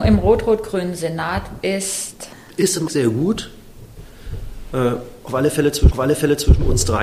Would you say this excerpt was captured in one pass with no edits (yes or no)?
no